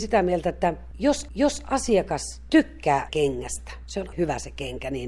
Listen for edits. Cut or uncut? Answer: cut